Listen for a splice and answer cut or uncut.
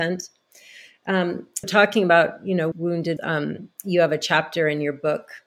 cut